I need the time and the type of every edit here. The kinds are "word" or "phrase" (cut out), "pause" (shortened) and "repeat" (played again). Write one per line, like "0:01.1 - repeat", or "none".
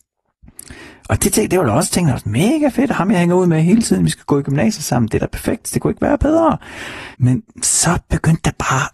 0:07.1 - pause